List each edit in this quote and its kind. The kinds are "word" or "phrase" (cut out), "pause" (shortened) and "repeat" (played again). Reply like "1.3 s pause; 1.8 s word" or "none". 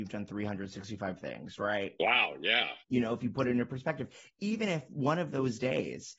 2.8 s pause